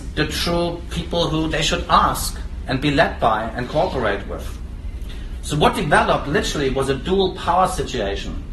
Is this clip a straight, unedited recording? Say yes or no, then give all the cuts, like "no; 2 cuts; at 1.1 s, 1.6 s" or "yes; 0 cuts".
yes; 0 cuts